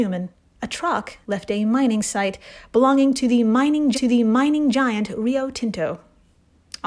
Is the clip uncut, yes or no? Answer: no